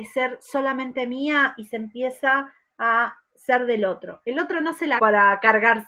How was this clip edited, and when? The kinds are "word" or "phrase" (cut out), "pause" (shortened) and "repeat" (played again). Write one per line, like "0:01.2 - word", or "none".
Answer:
0:05.0 - word